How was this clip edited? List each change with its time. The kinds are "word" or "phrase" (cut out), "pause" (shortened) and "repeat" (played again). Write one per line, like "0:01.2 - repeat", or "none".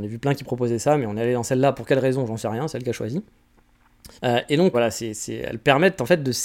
0:04.2 - pause
0:04.7 - word